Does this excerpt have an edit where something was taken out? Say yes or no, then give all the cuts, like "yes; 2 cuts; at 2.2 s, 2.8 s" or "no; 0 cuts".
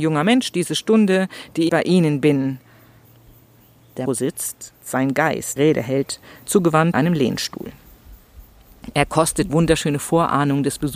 yes; 7 cuts; at 1.7 s, 4.1 s, 4.8 s, 5.6 s, 6.4 s, 6.9 s, 9.5 s